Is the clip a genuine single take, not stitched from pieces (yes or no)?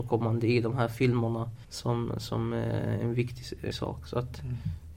no